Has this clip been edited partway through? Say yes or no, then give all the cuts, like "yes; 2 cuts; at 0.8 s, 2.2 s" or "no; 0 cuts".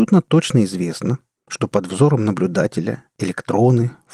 no; 0 cuts